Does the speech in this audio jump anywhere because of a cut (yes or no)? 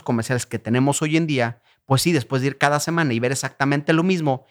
no